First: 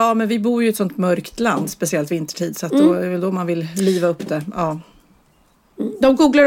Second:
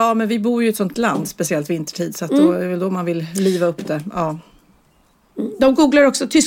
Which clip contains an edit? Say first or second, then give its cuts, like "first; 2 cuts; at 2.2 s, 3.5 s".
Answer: second; 1 cut; at 0.9 s